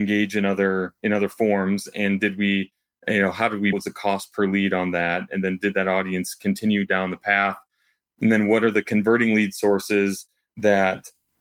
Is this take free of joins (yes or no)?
no